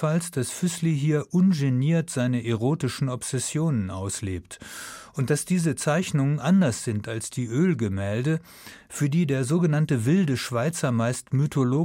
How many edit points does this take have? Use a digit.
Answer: 0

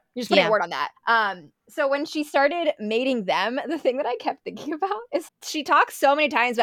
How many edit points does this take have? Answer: 2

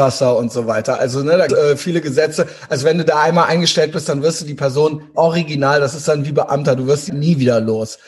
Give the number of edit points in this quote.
3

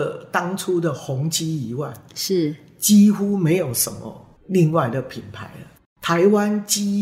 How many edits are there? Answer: 1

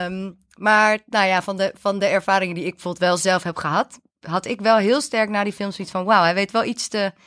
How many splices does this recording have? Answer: 0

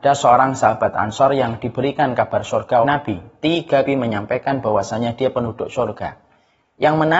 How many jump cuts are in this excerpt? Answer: 2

